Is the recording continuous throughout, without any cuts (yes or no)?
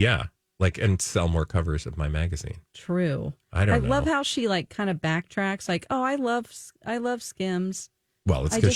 no